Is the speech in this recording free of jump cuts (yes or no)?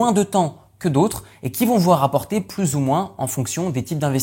yes